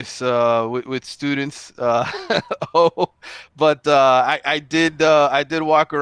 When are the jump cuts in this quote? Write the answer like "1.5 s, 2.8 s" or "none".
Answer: none